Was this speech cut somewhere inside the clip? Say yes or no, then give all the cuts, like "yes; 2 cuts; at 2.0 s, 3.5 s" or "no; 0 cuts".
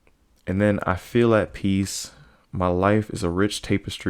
no; 0 cuts